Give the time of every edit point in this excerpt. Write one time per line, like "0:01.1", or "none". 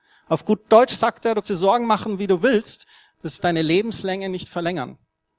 0:01.4
0:03.4